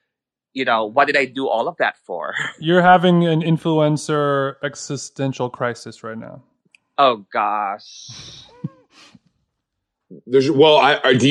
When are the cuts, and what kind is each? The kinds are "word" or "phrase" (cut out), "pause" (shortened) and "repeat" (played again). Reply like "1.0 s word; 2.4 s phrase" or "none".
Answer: none